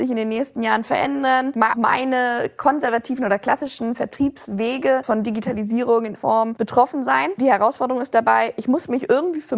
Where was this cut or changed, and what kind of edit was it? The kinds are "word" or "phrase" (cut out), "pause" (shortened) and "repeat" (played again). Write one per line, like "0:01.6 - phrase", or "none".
0:01.7 - word
0:05.0 - word
0:06.1 - word